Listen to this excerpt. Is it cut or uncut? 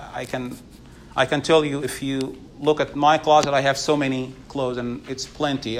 uncut